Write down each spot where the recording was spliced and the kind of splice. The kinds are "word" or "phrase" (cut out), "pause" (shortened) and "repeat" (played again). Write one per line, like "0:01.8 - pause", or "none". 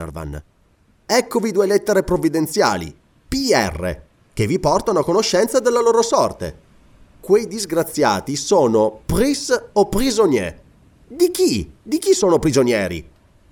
none